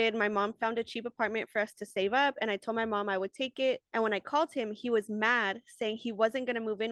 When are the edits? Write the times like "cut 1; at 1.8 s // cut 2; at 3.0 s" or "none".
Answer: cut 1; at 3.9 s